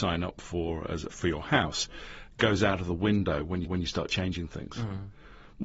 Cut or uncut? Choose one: cut